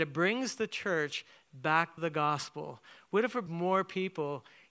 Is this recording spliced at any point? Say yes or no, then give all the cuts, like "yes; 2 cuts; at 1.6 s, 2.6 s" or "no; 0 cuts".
yes; 2 cuts; at 2.0 s, 3.5 s